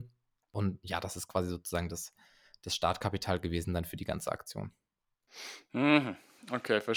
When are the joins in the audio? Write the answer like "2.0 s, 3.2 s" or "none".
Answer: none